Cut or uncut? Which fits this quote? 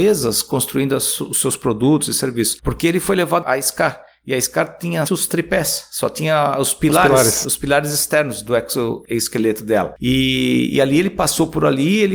cut